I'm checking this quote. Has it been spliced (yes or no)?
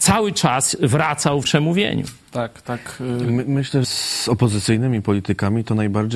yes